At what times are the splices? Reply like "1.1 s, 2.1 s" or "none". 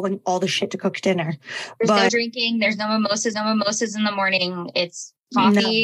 2.1 s, 3.3 s